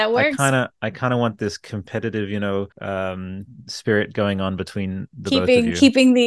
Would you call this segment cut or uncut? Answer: cut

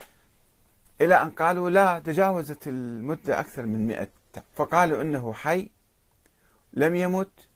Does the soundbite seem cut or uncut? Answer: cut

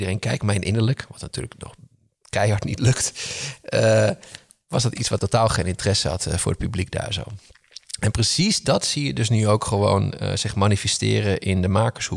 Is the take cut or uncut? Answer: cut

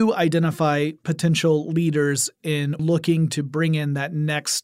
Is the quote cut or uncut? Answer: cut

